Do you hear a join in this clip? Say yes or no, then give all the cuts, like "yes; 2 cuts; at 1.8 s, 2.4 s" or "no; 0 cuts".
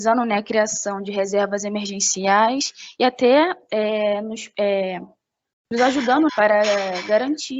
yes; 1 cut; at 6.3 s